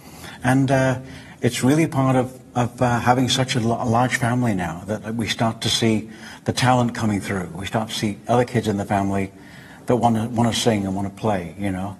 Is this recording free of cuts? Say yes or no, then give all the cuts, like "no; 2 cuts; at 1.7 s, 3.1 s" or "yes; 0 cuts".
yes; 0 cuts